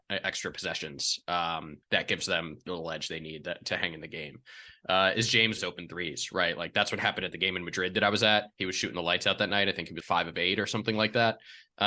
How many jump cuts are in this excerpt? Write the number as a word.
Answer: five